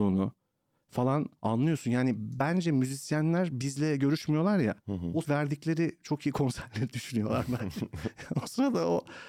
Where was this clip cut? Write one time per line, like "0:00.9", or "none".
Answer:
0:01.4
0:04.8
0:05.2